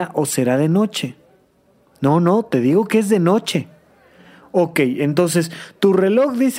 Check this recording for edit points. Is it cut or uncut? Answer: uncut